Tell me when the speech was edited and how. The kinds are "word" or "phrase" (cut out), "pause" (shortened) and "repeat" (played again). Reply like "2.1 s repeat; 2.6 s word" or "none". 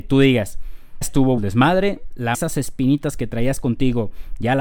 1.0 s word; 1.4 s word; 2.3 s phrase

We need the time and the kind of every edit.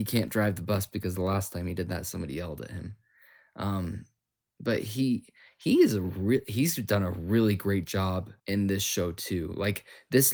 8.4 s pause

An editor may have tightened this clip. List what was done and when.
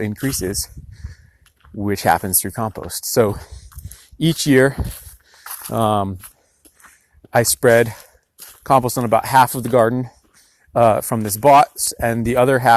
none

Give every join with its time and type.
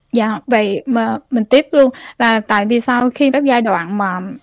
3.3 s word

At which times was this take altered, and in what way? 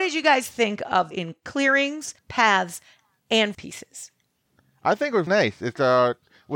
1.1 s phrase; 2.2 s pause; 3.5 s word; 5.3 s word

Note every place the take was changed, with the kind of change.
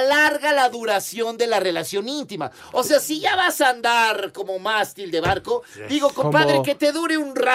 none

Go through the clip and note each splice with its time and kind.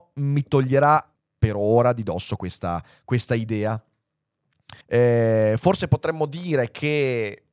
1.1 s pause; 4.8 s pause

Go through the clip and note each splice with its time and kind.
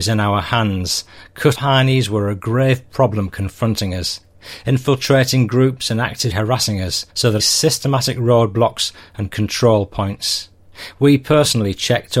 1.5 s word; 6.3 s phrase; 7.1 s pause; 7.4 s phrase

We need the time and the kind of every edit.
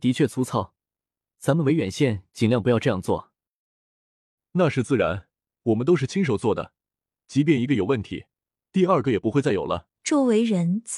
9.9 s pause

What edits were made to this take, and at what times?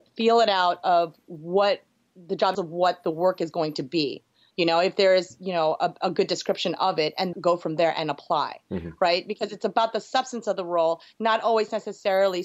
1.2 s pause; 2.5 s phrase; 7.3 s word

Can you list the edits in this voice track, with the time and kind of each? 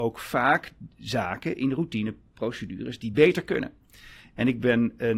none

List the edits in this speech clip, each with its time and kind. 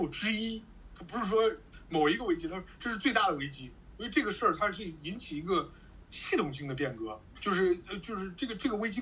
7.3 s word

